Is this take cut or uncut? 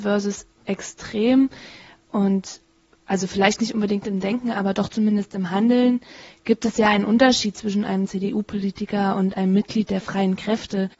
uncut